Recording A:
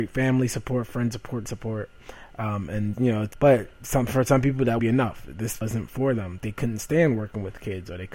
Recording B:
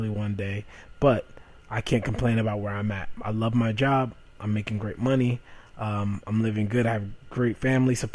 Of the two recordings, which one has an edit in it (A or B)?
A